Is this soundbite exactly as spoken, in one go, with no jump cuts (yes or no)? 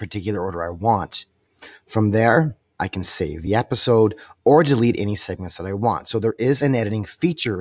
yes